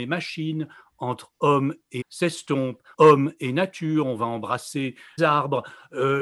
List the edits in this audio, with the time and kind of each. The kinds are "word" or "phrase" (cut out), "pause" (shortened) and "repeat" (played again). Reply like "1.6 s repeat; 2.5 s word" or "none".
2.0 s word; 2.9 s word; 5.2 s word